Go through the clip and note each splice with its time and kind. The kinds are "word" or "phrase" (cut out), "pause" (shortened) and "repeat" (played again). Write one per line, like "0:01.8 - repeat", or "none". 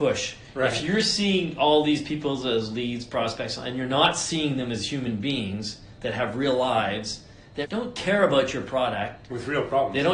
0:07.6 - word